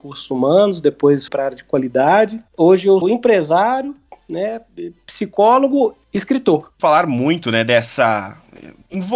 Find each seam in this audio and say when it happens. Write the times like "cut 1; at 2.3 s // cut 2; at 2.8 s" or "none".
cut 1; at 1.3 s // cut 2; at 3.0 s // cut 3; at 6.0 s // cut 4; at 6.8 s